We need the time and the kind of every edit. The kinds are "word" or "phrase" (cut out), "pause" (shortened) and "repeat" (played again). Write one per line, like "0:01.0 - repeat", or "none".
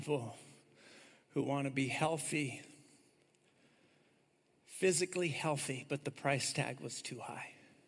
none